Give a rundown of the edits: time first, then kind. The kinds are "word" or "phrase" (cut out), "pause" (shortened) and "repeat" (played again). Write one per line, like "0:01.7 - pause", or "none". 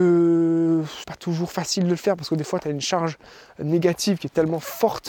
0:01.0 - word